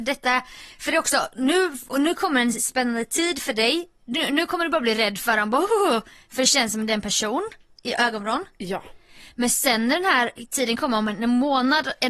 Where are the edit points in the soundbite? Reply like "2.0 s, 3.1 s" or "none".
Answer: none